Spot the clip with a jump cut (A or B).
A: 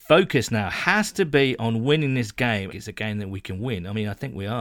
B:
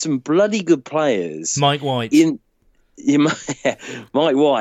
A